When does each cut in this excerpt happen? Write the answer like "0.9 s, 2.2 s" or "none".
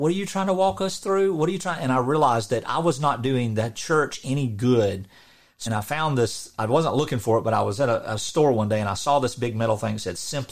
5.7 s